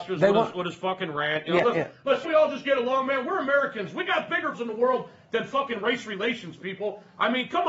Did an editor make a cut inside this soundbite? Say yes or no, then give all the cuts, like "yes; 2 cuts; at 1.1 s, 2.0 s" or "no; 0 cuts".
yes; 2 cuts; at 2.2 s, 4.5 s